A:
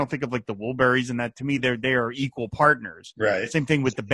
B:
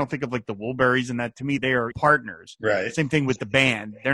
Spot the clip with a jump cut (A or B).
B